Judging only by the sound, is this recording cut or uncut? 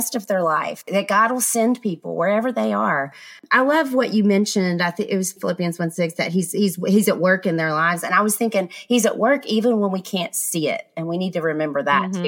cut